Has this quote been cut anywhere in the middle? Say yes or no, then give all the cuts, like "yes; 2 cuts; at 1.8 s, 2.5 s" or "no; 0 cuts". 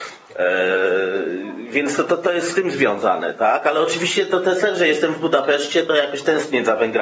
no; 0 cuts